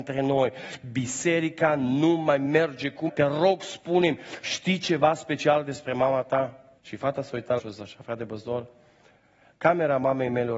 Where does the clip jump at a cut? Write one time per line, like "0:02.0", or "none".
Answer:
0:03.1
0:06.8
0:07.6